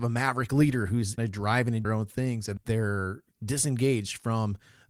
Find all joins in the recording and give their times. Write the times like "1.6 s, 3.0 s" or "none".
1.2 s, 1.8 s, 2.6 s